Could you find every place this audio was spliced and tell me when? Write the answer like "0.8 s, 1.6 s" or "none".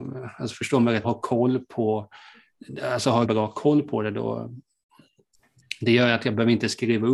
1.0 s, 3.2 s